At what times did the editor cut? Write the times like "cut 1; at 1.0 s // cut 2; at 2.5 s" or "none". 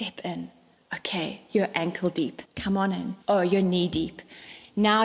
cut 1; at 2.5 s // cut 2; at 3.2 s